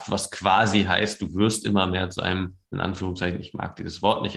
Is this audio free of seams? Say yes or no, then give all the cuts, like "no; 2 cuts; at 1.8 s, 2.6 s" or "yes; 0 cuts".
yes; 0 cuts